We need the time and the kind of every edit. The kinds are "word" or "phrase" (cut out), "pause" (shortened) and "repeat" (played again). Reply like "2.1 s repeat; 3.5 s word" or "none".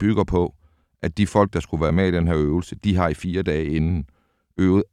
none